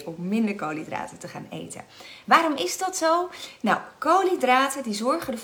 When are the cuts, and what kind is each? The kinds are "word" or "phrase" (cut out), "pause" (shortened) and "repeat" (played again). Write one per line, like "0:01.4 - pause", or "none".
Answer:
none